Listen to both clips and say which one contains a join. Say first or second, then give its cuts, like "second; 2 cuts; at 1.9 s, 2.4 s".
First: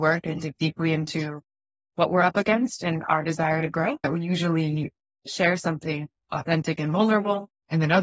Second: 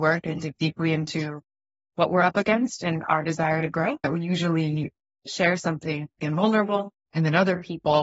second; 1 cut; at 6.2 s